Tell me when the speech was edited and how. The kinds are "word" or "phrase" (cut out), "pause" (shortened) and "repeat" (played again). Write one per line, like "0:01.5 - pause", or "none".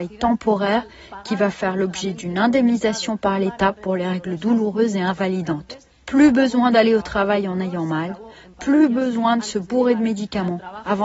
none